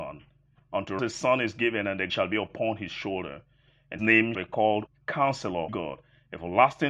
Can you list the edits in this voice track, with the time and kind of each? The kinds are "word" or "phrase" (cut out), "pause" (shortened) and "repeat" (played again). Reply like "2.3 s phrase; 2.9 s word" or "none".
1.0 s word; 2.1 s word; 4.0 s word; 4.3 s word; 4.9 s word; 5.7 s word